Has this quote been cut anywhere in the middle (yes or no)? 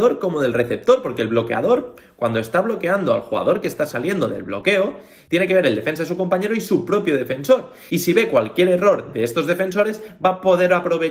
no